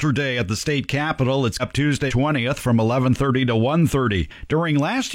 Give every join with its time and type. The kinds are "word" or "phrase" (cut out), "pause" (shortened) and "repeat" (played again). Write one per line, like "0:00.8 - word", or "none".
0:01.6 - word
0:02.1 - word